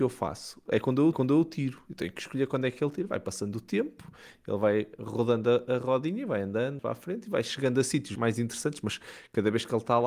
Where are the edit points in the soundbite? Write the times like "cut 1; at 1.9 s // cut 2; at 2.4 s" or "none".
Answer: cut 1; at 1.1 s // cut 2; at 6.8 s